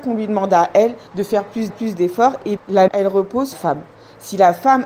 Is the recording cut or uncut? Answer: cut